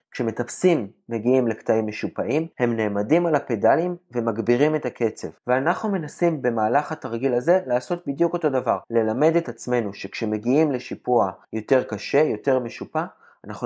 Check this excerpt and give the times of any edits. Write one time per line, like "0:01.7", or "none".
0:02.5
0:05.4
0:08.8
0:11.4